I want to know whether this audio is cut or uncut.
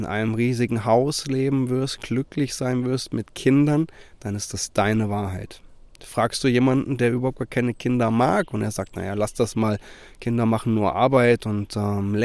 uncut